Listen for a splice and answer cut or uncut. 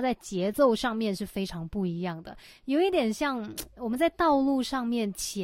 uncut